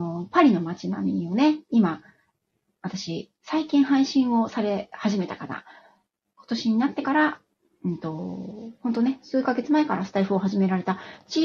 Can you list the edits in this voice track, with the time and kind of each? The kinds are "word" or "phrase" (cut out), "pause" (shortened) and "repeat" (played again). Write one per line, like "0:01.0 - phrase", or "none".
none